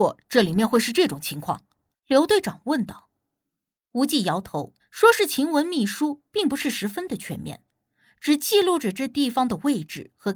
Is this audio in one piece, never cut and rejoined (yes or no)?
no